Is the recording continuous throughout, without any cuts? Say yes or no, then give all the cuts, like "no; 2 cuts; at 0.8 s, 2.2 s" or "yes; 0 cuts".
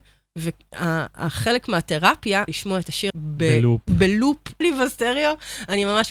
no; 3 cuts; at 2.5 s, 3.1 s, 4.6 s